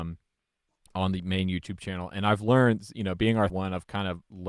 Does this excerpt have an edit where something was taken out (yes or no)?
yes